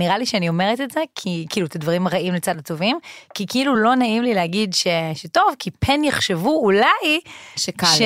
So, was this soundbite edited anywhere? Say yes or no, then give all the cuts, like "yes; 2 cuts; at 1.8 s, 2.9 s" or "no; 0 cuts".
no; 0 cuts